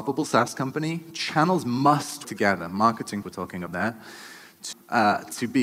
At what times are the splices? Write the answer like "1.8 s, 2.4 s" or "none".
2.2 s, 3.2 s, 3.7 s, 4.7 s